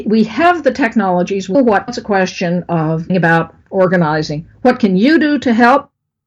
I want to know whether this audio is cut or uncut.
cut